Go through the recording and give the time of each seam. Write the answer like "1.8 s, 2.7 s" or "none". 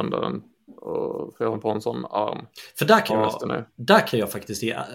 1.5 s, 3.1 s